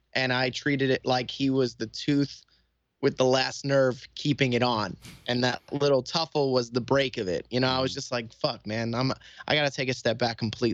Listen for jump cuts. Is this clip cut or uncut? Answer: uncut